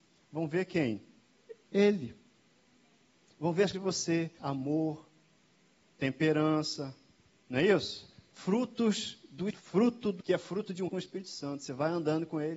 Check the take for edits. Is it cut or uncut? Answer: cut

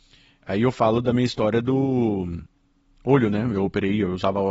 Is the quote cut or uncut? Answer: uncut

